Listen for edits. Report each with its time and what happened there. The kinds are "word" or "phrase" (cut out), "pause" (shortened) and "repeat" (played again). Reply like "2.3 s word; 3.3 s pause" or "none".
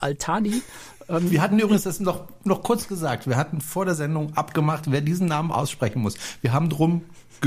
none